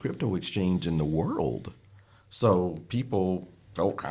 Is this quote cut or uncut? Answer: uncut